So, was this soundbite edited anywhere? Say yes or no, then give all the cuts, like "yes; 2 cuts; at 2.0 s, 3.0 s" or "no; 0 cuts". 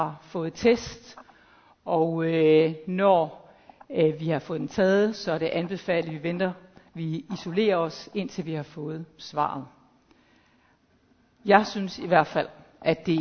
no; 0 cuts